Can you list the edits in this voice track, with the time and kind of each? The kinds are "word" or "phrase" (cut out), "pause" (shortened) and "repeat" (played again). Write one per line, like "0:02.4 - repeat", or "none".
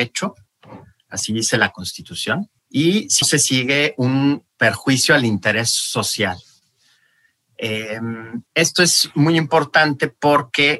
0:02.6 - pause
0:03.2 - word
0:08.5 - pause